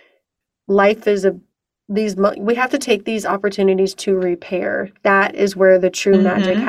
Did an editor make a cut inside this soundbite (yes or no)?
no